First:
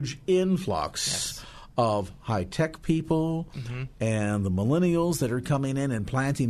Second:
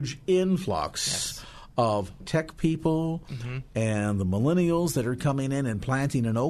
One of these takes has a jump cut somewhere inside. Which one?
second; 1 cut; at 2.2 s

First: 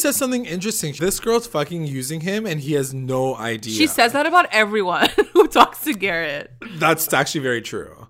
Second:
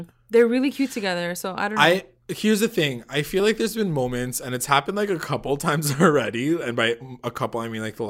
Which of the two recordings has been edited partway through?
first; 2 cuts; at 1.0 s, 7.1 s

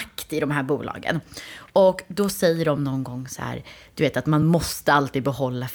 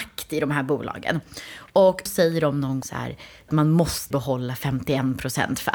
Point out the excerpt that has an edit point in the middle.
second; 4 cuts; at 2.1 s, 2.8 s, 3.5 s, 4.1 s

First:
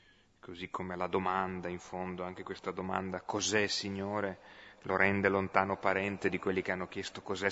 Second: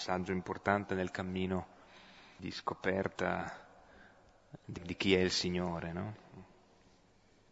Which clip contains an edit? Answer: second; 2 cuts; at 2.4 s, 4.8 s

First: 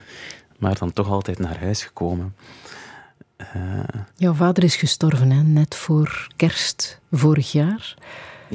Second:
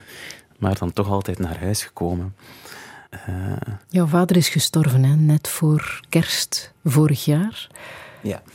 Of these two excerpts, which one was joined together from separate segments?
second; 1 cut; at 3.1 s

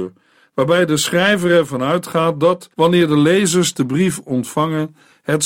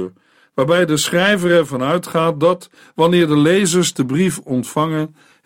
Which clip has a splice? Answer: first; 1 cut; at 2.7 s

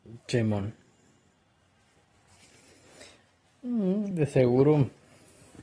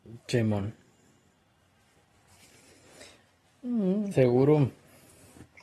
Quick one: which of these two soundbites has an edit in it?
second; 1 cut; at 4.1 s

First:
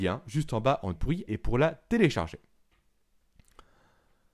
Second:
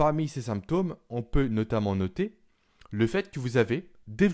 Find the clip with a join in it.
first; 2 cuts; at 1.0 s, 1.3 s

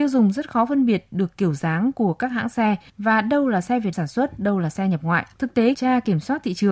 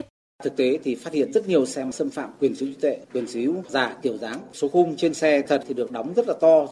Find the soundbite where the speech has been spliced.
first; 3 cuts; at 3.9 s, 5.3 s, 5.7 s

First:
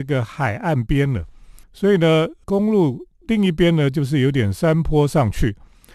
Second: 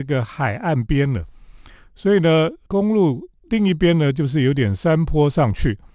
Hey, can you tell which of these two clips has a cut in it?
first; 1 cut; at 1.6 s

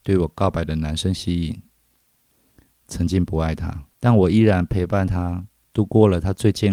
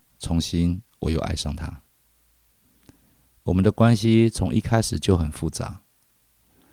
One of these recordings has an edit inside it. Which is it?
first; 1 cut; at 3.9 s

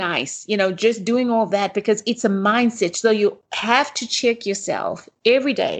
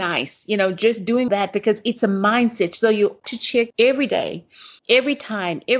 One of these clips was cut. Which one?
second; 4 cuts; at 1.3 s, 3.2 s, 3.7 s, 4.8 s

